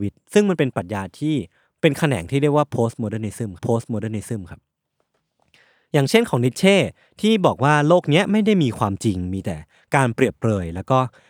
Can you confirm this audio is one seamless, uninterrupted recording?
no; 1 cut; at 3.6 s

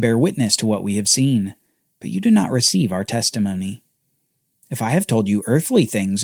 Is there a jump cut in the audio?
no; 0 cuts

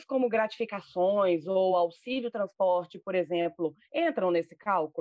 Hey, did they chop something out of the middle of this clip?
no; 0 cuts

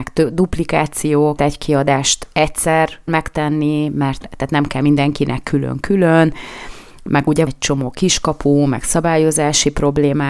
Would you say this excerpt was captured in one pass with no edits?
no; 4 cuts; at 1.4 s, 3.1 s, 4.2 s, 7.5 s

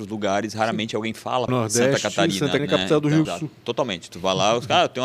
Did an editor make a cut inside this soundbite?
yes; 3 cuts; at 1.5 s, 2.6 s, 3.2 s

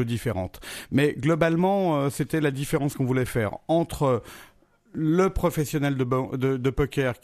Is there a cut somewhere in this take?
no; 0 cuts

